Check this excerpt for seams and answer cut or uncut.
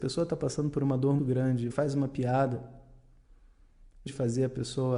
cut